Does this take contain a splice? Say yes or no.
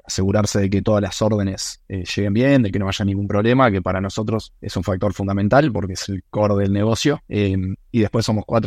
yes